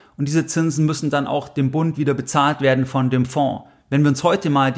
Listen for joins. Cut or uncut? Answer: uncut